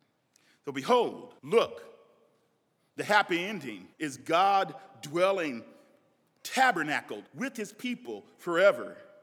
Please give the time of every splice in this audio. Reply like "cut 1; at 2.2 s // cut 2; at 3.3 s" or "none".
cut 1; at 1.4 s // cut 2; at 3.9 s // cut 3; at 7.3 s